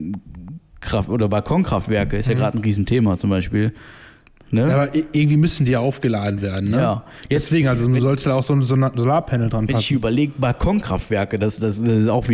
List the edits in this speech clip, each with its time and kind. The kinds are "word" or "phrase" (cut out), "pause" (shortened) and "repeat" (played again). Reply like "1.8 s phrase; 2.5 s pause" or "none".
none